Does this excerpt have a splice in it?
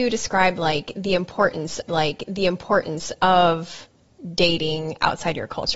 yes; 1 cut; at 1.9 s

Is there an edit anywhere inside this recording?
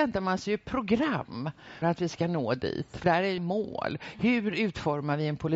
yes; 3 cuts; at 1.8 s, 3.0 s, 3.4 s

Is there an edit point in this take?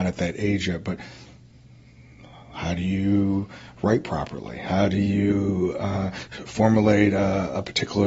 yes; 1 cut; at 6.5 s

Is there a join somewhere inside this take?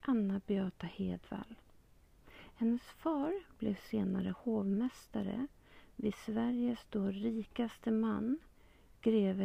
no; 0 cuts

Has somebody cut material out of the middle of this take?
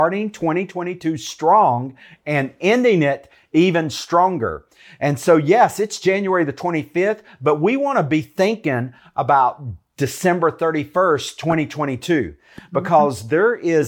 no; 0 cuts

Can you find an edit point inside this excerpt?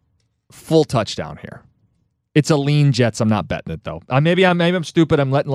no; 0 cuts

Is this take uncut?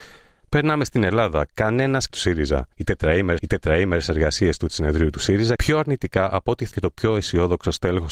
no; 6 cuts; at 2.1 s, 2.7 s, 3.4 s, 4.7 s, 5.6 s, 6.7 s

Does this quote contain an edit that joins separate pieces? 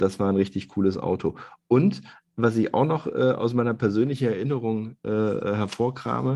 no; 0 cuts

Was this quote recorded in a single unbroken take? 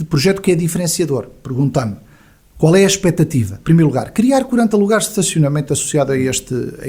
yes; 0 cuts

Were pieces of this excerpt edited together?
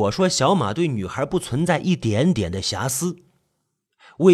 no; 0 cuts

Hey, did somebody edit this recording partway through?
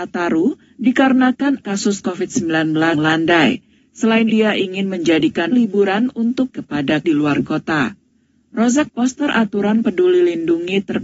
yes; 7 cuts; at 1.6 s, 2.9 s, 4.3 s, 5.5 s, 6.5 s, 7.0 s, 8.9 s

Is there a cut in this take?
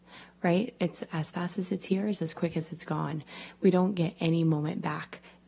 no; 0 cuts

